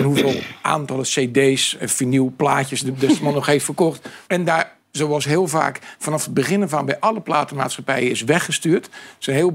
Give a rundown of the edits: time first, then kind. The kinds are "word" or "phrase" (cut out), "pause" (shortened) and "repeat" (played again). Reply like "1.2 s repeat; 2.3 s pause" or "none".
4.2 s pause